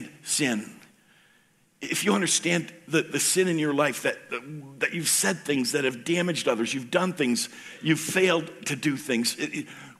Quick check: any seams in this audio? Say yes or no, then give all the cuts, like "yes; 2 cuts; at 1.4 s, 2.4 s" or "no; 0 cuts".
no; 0 cuts